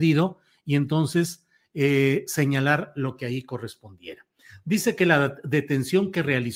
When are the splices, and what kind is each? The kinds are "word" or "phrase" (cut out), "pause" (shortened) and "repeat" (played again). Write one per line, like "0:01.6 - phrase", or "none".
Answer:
none